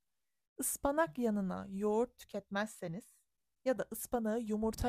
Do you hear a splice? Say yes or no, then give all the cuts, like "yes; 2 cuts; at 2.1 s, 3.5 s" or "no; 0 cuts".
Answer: no; 0 cuts